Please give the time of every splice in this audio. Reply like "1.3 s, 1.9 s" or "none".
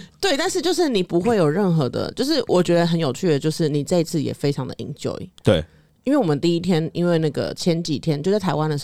5.3 s